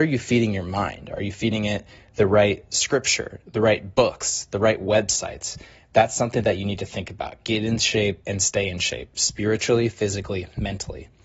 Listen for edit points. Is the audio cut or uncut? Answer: uncut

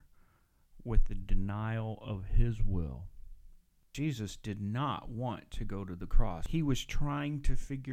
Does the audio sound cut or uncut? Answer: uncut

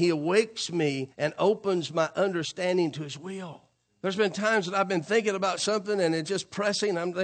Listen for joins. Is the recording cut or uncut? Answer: cut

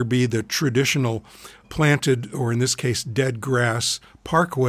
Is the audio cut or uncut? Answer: cut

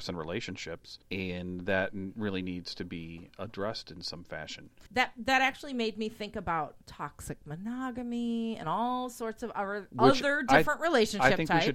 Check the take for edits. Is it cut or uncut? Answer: cut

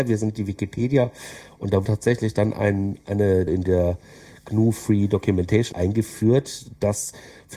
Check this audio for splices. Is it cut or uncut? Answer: cut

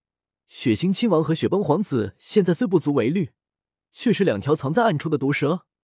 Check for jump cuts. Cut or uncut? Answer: uncut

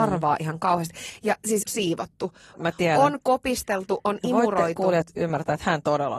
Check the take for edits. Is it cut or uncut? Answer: cut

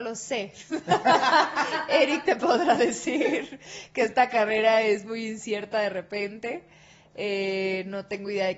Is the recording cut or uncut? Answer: uncut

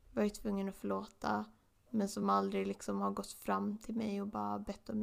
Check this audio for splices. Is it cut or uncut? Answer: uncut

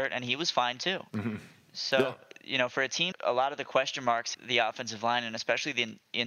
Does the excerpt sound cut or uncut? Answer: cut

